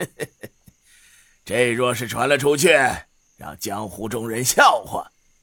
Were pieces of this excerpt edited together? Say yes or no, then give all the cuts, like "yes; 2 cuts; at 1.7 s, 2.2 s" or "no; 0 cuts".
no; 0 cuts